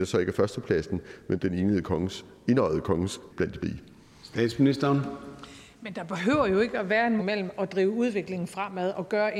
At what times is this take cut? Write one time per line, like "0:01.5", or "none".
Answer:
0:01.4
0:03.3
0:03.6
0:07.2